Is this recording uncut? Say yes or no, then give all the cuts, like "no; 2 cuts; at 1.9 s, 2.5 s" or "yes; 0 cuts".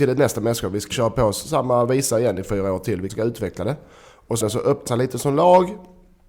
no; 5 cuts; at 0.9 s, 2.4 s, 3.1 s, 4.4 s, 4.9 s